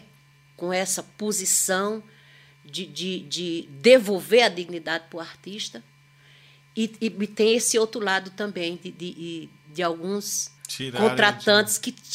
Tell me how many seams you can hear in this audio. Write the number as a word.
one